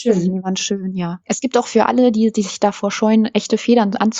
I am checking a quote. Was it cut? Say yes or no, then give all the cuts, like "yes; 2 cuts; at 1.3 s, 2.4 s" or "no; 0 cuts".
yes; 1 cut; at 1.2 s